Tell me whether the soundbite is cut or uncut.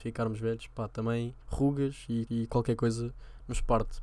cut